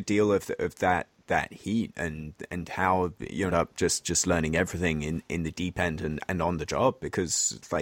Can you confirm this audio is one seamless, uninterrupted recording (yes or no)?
no